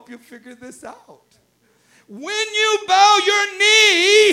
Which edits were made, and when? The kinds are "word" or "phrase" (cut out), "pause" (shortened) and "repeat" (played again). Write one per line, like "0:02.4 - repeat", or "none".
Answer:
none